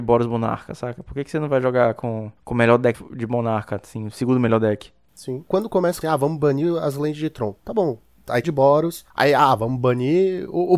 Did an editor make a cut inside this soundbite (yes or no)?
yes